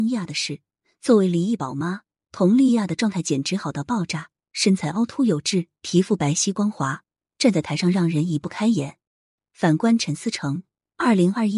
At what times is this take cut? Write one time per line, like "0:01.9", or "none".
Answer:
none